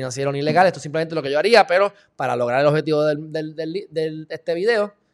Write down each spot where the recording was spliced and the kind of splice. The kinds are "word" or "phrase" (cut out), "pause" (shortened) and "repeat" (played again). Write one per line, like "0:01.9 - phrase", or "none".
none